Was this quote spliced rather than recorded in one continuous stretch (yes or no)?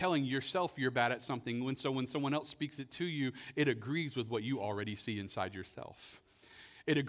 no